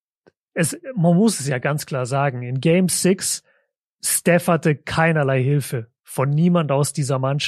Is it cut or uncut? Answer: uncut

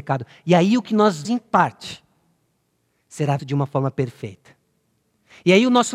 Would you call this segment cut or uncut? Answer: cut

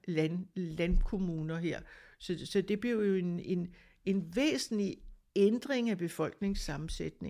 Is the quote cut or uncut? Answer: uncut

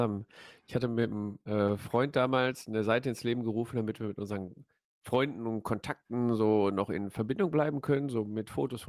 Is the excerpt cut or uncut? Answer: uncut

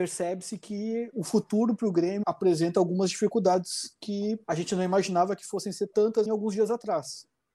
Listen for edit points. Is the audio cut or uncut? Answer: cut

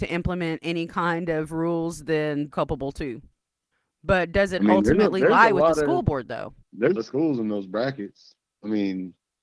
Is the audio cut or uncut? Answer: cut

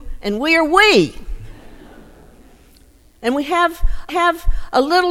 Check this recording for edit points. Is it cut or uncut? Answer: cut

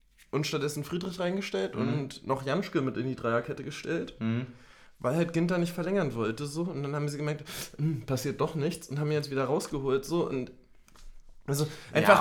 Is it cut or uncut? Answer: uncut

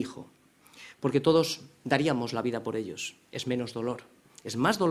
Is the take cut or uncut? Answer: uncut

